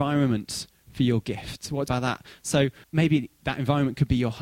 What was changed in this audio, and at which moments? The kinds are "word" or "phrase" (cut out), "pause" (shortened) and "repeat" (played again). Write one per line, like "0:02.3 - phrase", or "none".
0:01.9 - phrase
0:02.8 - pause